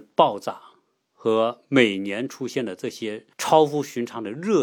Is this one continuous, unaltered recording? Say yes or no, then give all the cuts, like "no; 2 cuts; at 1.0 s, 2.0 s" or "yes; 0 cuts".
no; 1 cut; at 3.3 s